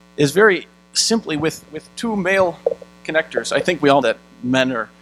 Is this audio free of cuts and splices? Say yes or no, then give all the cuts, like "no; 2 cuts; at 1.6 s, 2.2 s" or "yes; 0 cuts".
no; 1 cut; at 4.0 s